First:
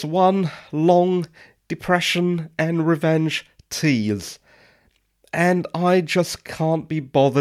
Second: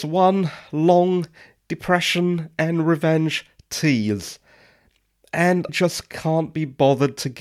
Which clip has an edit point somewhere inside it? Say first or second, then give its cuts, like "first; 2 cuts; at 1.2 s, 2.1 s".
second; 1 cut; at 5.7 s